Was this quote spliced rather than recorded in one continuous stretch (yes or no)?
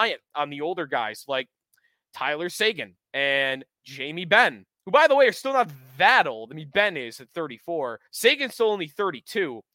yes